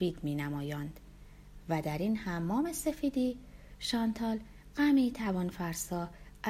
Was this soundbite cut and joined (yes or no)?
no